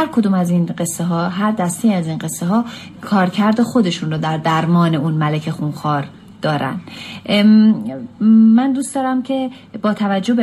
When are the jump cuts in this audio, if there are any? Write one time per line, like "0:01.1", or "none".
none